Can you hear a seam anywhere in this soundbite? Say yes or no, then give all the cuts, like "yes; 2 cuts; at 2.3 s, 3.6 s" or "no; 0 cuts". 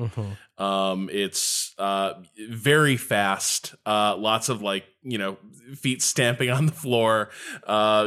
no; 0 cuts